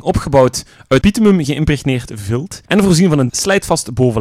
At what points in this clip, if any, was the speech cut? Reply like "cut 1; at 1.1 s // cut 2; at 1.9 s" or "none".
cut 1; at 1.0 s // cut 2; at 2.7 s // cut 3; at 3.3 s